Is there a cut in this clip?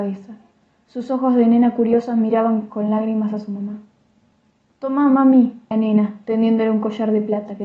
yes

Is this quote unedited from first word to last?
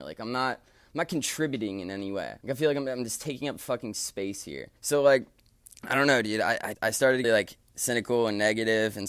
no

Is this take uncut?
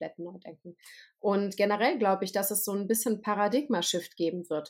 yes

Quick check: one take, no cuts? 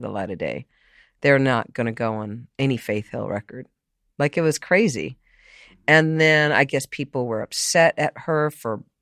yes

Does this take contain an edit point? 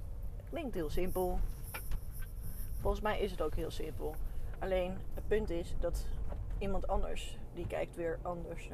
no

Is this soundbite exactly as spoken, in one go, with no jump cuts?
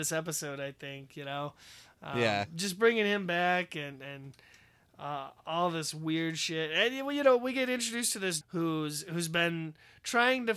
no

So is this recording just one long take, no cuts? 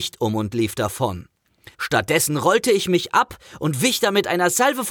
no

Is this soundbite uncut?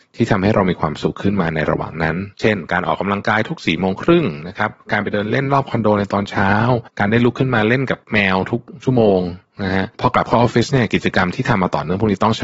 no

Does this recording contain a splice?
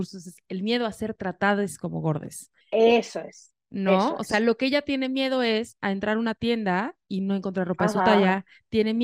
yes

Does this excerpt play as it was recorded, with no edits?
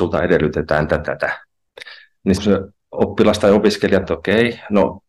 no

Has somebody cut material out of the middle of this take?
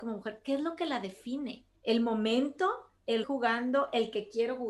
yes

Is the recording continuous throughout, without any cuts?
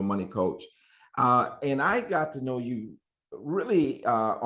yes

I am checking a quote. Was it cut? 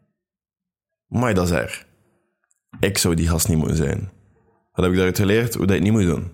no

